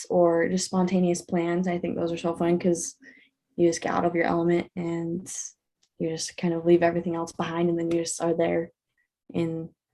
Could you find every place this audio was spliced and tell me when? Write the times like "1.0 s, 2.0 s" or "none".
none